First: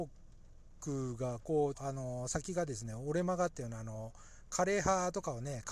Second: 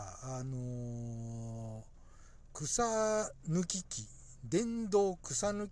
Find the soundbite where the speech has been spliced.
first; 1 cut; at 1.7 s

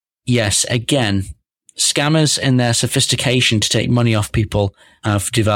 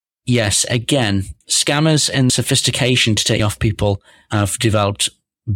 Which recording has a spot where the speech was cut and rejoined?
second; 3 cuts; at 1.4 s, 2.3 s, 3.4 s

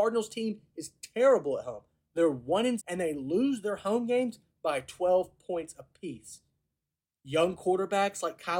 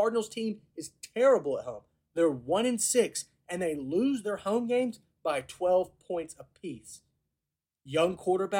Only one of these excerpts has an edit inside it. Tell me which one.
first; 1 cut; at 2.8 s

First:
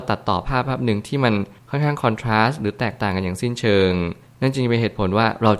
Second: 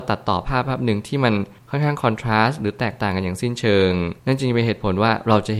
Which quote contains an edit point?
second; 1 cut; at 4.2 s

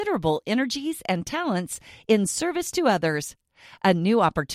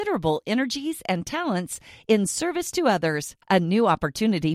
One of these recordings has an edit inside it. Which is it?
second; 1 cut; at 3.4 s

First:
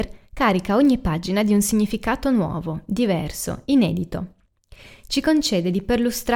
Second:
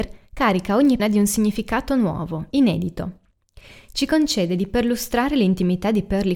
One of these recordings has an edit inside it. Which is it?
second; 2 cuts; at 1.0 s, 2.5 s

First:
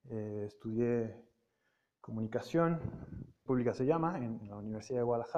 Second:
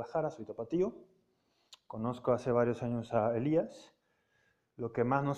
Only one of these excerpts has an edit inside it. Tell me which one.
first; 1 cut; at 3.5 s

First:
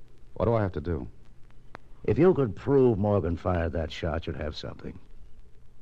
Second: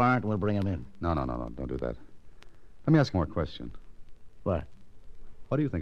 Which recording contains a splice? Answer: second; 1 cut; at 3.1 s

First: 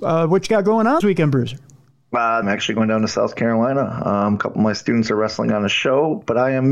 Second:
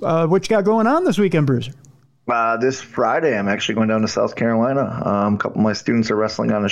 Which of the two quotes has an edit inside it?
first; 2 cuts; at 1.0 s, 2.4 s

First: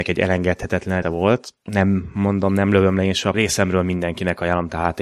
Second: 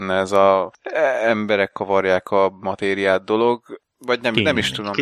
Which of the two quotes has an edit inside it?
first; 2 cuts; at 1.0 s, 3.3 s

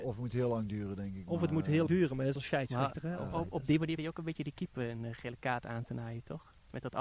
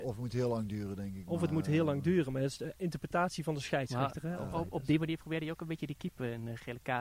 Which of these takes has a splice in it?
first; 3 cuts; at 1.9 s, 2.4 s, 4.0 s

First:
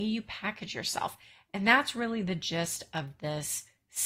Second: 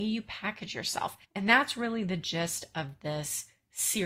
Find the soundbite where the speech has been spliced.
second; 1 cut; at 1.2 s

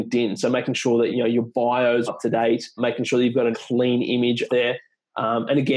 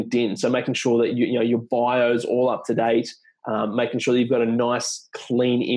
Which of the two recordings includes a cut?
first; 5 cuts; at 1.1 s, 2.1 s, 2.8 s, 3.5 s, 4.5 s

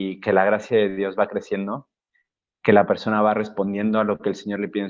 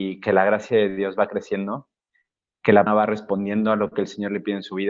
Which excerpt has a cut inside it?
second; 1 cut; at 2.9 s

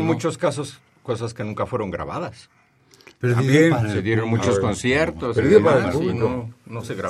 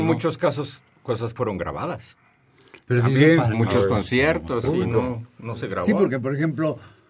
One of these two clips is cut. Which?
second; 3 cuts; at 1.4 s, 3.5 s, 4.6 s

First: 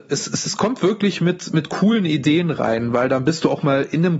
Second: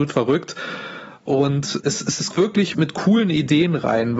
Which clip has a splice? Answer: second; 3 cuts; at 1.8 s, 2.3 s, 2.7 s

